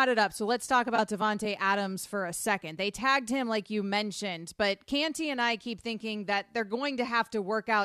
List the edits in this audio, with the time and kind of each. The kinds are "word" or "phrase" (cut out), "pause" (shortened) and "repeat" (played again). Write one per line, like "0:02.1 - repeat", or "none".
none